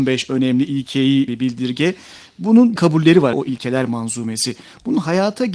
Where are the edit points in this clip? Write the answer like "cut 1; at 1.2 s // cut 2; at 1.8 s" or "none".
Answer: cut 1; at 1.3 s // cut 2; at 2.8 s // cut 3; at 3.3 s

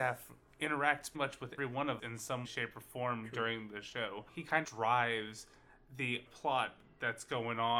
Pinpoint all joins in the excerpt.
cut 1; at 1.1 s // cut 2; at 1.6 s // cut 3; at 2.0 s // cut 4; at 2.4 s // cut 5; at 4.6 s // cut 6; at 6.3 s

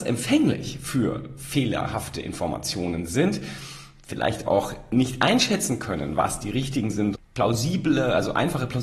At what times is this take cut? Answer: cut 1; at 7.1 s

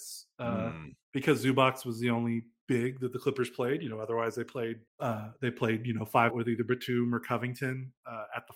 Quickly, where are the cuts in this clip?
cut 1; at 4.9 s // cut 2; at 6.3 s

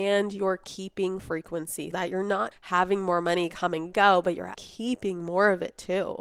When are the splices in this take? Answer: cut 1; at 1.2 s // cut 2; at 1.9 s // cut 3; at 2.5 s // cut 4; at 4.5 s

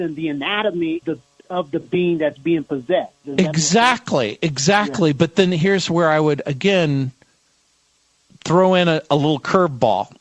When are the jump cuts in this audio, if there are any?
cut 1; at 1.0 s

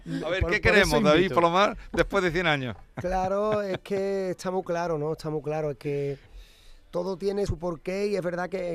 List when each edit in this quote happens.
cut 1; at 7.5 s

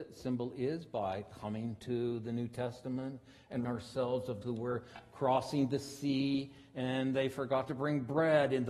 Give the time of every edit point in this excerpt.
cut 1; at 3.6 s // cut 2; at 4.4 s

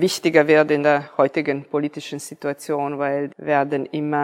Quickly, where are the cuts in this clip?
cut 1; at 3.3 s

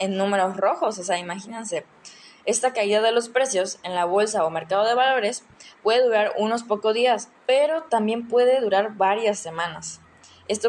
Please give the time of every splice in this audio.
cut 1; at 7.3 s

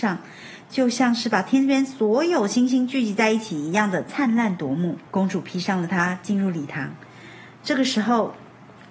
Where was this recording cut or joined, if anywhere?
cut 1; at 5.1 s

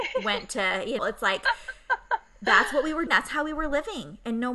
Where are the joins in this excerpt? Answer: cut 1; at 1.0 s // cut 2; at 3.1 s

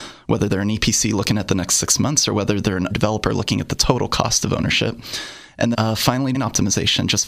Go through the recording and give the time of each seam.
cut 1; at 2.9 s // cut 2; at 5.7 s // cut 3; at 6.3 s

